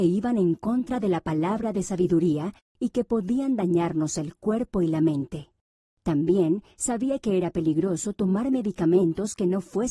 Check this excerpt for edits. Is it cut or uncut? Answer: uncut